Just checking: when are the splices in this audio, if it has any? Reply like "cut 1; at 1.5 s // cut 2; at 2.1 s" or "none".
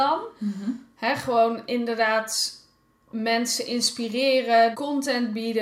cut 1; at 4.7 s